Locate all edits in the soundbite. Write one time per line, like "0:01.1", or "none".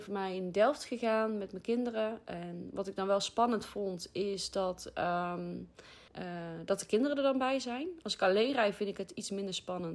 0:06.1